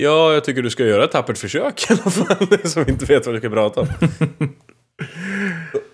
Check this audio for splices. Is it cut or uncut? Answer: uncut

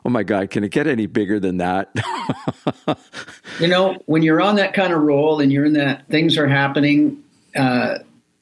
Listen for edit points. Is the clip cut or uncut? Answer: cut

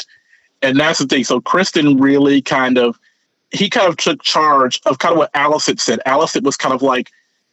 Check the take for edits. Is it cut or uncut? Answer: uncut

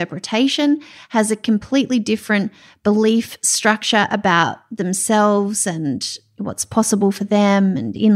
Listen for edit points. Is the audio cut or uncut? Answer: uncut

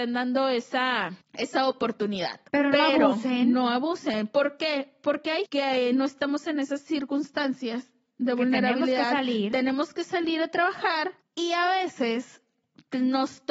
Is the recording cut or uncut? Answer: cut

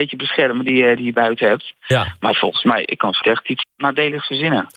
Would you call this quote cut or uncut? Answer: cut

